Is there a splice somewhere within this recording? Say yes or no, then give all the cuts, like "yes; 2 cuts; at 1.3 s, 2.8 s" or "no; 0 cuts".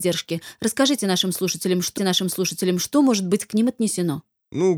yes; 1 cut; at 2.0 s